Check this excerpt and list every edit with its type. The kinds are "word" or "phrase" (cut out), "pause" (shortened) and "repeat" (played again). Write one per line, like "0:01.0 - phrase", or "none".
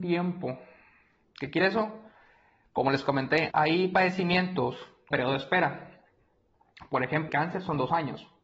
0:01.6 - word
0:03.5 - word
0:05.1 - word
0:07.3 - word